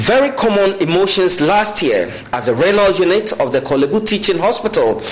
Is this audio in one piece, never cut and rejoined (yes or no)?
yes